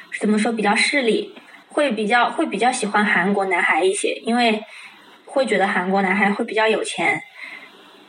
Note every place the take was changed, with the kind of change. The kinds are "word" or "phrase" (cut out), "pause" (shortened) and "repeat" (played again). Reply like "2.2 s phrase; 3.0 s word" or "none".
1.6 s pause